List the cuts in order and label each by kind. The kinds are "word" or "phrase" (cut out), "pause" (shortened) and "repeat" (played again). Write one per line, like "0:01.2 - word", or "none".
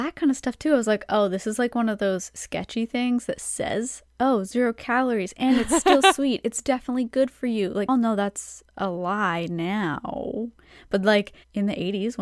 0:07.9 - phrase
0:08.7 - pause